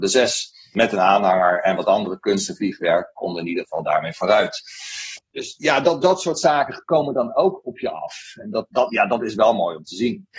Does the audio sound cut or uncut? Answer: uncut